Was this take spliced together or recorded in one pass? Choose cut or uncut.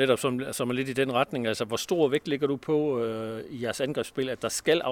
uncut